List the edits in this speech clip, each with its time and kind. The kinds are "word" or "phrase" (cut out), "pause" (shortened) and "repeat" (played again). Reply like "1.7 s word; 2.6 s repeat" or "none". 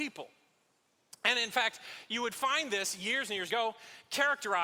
3.5 s phrase